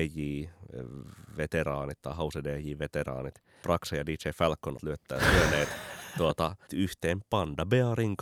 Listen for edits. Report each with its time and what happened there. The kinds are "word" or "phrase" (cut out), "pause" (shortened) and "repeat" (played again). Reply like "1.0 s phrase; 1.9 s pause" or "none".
3.6 s word; 4.8 s word; 6.7 s word